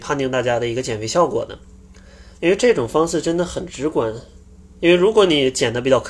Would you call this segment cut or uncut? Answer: uncut